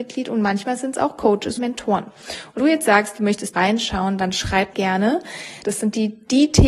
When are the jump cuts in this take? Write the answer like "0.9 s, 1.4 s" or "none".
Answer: 1.6 s, 2.6 s, 3.5 s, 4.7 s